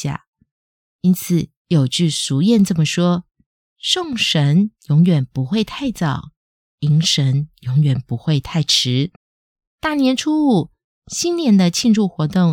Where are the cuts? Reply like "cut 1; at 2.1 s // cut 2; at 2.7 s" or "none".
cut 1; at 9.2 s